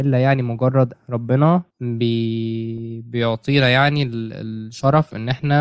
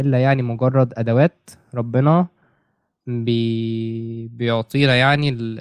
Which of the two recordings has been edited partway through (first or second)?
first